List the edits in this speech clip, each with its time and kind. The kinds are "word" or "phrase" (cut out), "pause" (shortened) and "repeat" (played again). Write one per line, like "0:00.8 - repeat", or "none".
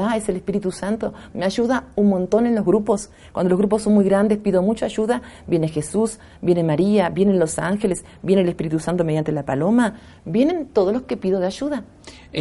none